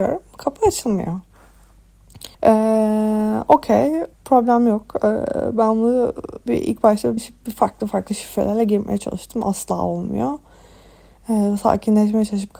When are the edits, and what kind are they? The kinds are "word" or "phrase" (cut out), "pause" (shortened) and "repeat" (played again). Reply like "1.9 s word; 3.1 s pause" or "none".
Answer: 2.3 s pause; 4.1 s pause; 6.5 s phrase; 7.2 s phrase